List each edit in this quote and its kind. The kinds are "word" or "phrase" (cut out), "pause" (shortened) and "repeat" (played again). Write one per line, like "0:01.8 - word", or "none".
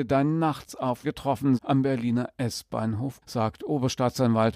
0:01.0 - word
0:01.6 - word
0:03.2 - word